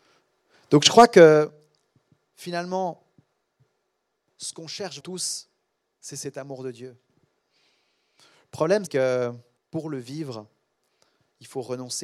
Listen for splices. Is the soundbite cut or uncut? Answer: cut